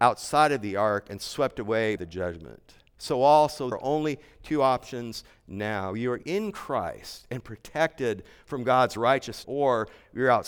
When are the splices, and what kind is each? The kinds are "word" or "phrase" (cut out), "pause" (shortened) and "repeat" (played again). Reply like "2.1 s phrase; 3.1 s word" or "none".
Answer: 2.0 s word; 3.7 s word; 6.2 s word; 9.4 s word